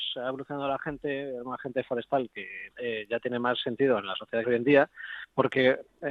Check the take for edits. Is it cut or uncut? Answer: cut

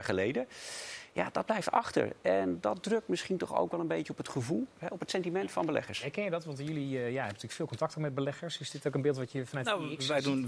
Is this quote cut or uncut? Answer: uncut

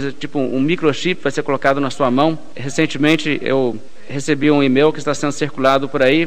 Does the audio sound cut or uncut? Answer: uncut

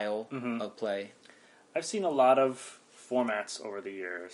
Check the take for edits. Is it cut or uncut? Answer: uncut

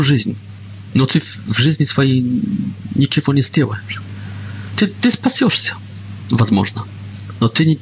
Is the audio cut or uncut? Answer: uncut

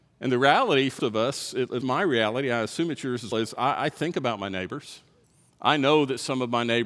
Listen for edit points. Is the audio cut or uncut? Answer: cut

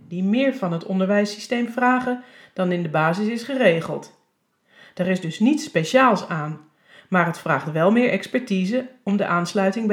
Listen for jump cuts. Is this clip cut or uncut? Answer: uncut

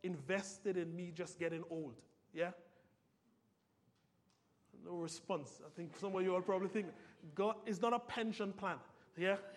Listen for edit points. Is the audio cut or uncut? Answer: uncut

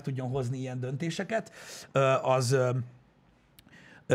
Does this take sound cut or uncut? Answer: uncut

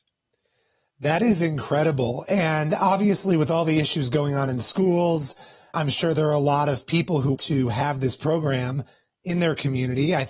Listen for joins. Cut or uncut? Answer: cut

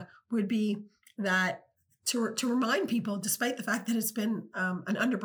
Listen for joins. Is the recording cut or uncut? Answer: uncut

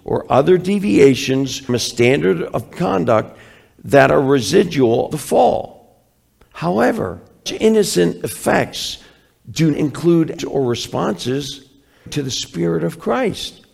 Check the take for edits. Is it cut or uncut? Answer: cut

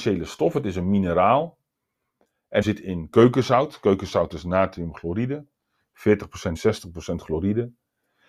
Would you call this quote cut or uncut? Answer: cut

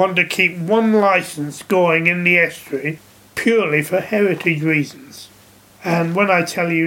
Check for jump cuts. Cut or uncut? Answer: uncut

